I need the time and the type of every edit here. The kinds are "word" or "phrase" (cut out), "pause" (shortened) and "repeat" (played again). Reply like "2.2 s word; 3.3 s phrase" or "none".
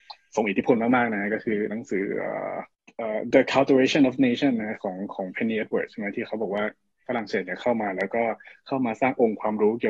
3.3 s word